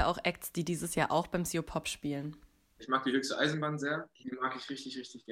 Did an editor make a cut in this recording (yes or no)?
no